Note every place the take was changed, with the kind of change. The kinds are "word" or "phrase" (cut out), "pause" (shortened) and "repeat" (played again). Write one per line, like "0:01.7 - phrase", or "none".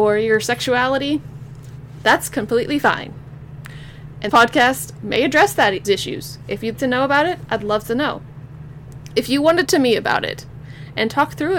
0:04.3 - word
0:05.8 - word
0:06.7 - word
0:09.7 - word

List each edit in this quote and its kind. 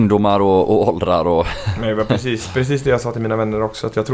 none

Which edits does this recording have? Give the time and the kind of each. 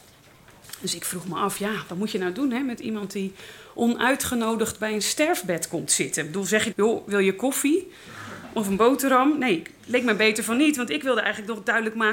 0:06.7 - word

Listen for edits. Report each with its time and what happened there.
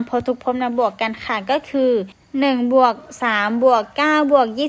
0:02.1 - pause

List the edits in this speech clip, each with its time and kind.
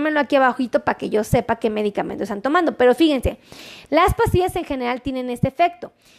none

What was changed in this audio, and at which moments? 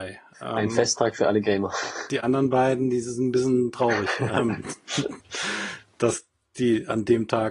none

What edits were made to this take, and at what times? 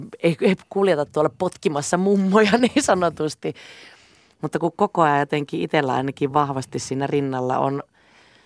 none

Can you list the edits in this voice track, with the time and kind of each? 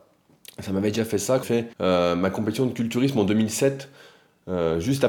0:01.4 - word
0:01.7 - pause

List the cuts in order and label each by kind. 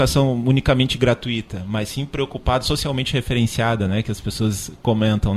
none

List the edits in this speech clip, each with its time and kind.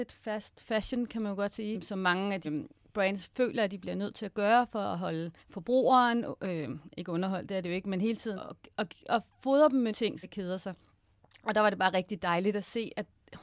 0:02.4 - word
0:05.4 - pause
0:08.4 - word
0:09.9 - word
0:10.2 - phrase

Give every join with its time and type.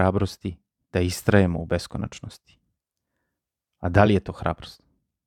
none

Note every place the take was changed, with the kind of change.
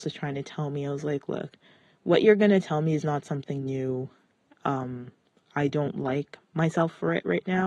none

